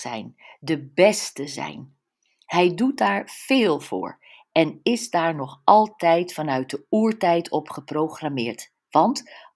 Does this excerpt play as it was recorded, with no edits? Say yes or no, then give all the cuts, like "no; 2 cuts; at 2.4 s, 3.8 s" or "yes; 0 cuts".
yes; 0 cuts